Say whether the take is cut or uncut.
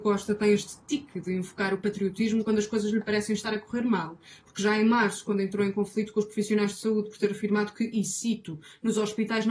uncut